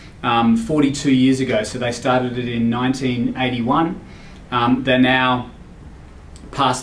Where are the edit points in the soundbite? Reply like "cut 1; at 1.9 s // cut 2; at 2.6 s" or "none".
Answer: none